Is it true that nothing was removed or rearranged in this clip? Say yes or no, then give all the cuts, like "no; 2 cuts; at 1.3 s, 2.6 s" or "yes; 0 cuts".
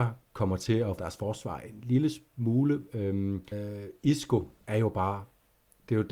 no; 2 cuts; at 1.0 s, 3.5 s